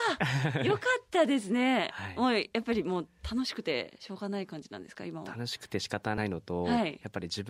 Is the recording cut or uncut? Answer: uncut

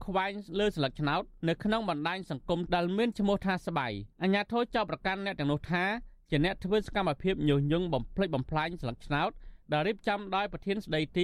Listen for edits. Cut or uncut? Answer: cut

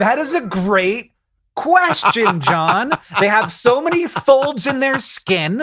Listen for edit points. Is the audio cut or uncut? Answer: uncut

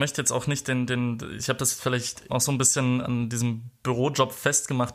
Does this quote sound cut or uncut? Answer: cut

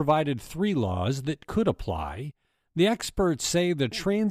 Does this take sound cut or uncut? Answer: uncut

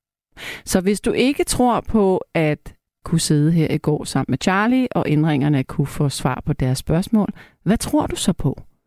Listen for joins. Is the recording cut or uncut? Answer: cut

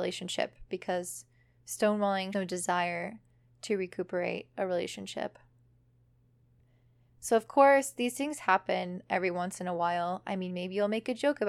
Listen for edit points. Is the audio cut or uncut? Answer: cut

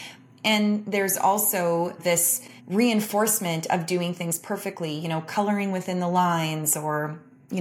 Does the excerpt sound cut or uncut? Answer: cut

